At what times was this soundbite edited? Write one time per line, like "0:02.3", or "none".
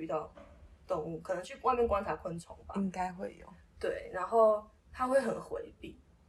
0:04.8